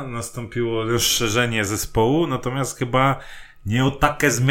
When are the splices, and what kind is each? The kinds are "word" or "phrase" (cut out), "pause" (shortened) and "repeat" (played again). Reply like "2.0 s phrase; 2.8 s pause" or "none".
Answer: none